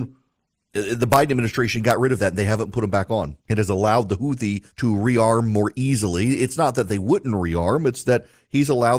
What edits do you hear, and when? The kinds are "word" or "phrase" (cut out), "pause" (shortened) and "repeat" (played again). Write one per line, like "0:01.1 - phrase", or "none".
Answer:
0:03.4 - pause
0:04.7 - pause